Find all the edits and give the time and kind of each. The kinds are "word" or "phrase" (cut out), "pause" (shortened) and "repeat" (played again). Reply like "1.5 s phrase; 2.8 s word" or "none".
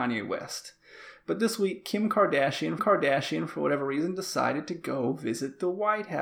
2.8 s repeat